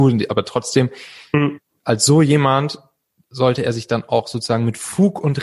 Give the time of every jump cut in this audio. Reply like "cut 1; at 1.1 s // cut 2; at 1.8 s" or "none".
none